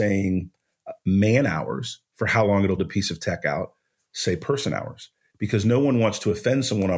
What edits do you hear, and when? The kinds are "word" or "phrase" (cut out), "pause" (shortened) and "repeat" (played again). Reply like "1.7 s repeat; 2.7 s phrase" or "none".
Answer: 2.8 s phrase